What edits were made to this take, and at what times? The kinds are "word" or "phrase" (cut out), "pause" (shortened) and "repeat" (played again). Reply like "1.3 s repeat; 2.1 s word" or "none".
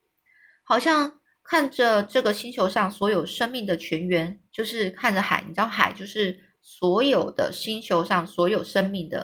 4.5 s pause